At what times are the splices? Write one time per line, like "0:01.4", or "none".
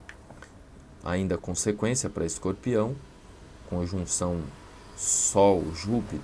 0:01.4
0:03.6